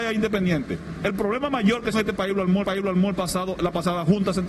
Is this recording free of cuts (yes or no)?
no